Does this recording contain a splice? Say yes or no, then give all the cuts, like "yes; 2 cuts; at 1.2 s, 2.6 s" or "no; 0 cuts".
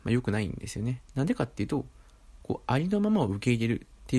yes; 1 cut; at 1.1 s